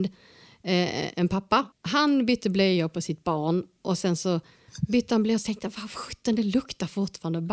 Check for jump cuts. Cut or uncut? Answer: cut